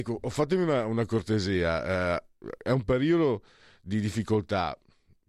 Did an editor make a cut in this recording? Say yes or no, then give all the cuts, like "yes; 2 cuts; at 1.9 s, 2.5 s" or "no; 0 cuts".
no; 0 cuts